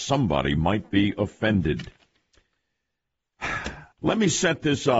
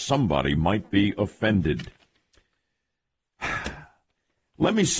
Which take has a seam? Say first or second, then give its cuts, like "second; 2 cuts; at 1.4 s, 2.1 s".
first; 1 cut; at 3.9 s